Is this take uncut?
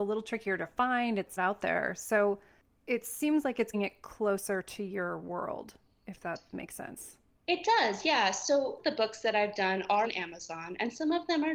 no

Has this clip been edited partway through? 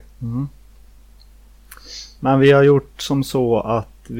no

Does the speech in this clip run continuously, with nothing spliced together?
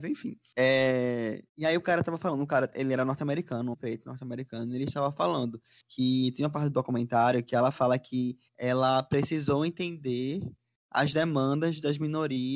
no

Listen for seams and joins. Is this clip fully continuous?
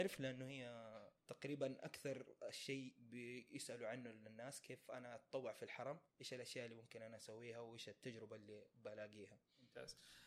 no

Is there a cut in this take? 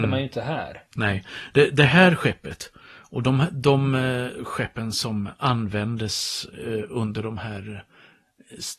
no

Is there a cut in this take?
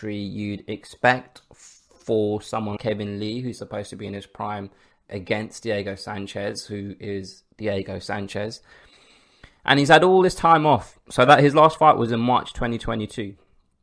yes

